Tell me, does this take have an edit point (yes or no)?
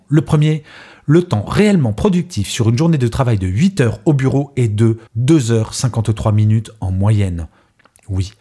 yes